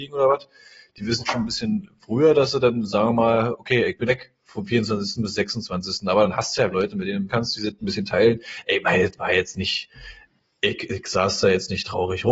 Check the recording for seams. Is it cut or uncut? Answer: cut